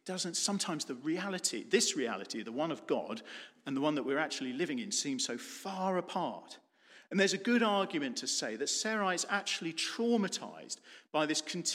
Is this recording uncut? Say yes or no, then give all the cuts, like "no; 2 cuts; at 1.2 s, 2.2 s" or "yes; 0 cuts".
yes; 0 cuts